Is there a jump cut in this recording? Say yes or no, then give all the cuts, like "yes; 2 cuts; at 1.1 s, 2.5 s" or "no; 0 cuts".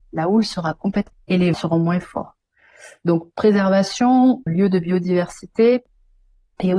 yes; 3 cuts; at 1.1 s, 1.5 s, 4.5 s